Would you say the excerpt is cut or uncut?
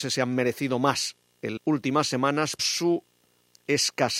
cut